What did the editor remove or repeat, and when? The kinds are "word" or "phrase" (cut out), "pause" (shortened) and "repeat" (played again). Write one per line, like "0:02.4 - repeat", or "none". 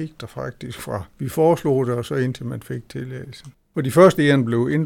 0:01.1 - pause
0:03.6 - pause

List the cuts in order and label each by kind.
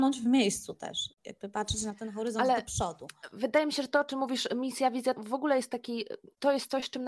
0:05.2 - word

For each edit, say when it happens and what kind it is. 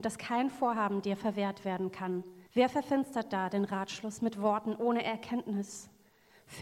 0:02.5 - pause

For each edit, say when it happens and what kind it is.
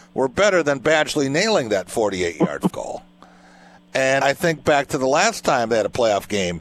0:02.7 - word
0:04.2 - word

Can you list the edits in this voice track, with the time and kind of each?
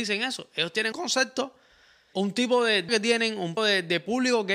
0:00.9 - word
0:02.1 - word
0:02.9 - word
0:03.6 - word

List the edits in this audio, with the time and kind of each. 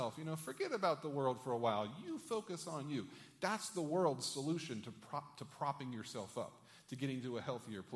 none

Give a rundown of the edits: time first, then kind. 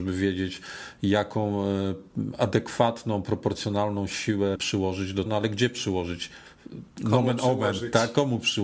0:04.6 - word
0:05.3 - word

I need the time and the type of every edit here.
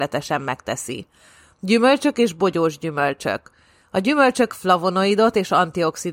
0:04.5 - word

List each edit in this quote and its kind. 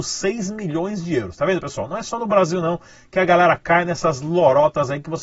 none

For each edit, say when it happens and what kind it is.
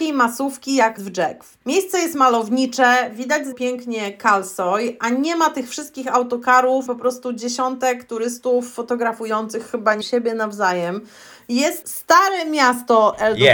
0:01.0 - word
0:01.6 - pause
0:03.5 - word
0:06.9 - word
0:10.0 - word
0:11.8 - word

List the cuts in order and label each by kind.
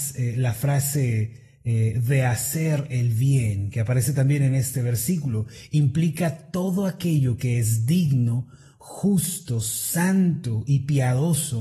none

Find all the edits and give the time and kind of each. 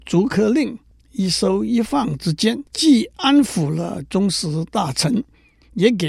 0:02.7 - pause

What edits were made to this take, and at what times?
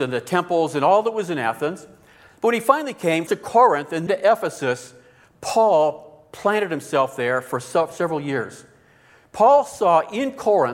0:03.3 - word
0:04.1 - word

